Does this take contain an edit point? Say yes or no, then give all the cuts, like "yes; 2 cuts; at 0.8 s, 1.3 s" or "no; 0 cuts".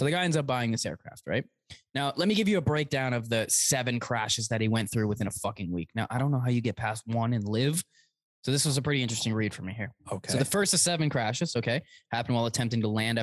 no; 0 cuts